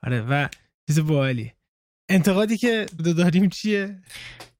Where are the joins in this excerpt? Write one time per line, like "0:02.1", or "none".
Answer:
0:03.0